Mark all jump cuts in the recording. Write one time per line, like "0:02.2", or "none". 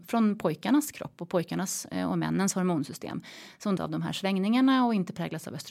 0:03.8